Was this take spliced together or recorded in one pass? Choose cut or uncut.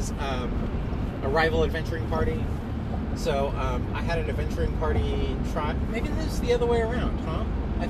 uncut